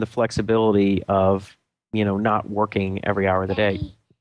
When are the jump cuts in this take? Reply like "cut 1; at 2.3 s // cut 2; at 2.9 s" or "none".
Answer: none